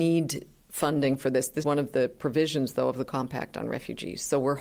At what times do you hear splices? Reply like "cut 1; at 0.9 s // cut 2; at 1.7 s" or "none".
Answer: cut 1; at 1.6 s // cut 2; at 3.0 s